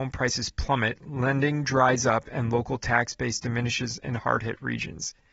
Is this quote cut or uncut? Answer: uncut